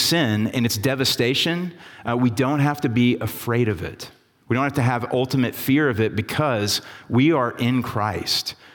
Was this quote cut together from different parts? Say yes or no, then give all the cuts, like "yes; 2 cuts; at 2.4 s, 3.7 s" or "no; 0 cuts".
no; 0 cuts